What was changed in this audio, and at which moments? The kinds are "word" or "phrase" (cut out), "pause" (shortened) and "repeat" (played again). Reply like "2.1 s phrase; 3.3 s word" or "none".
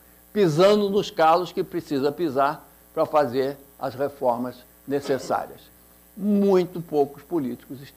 none